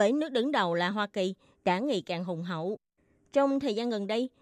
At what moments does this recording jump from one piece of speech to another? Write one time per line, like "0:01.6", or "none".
none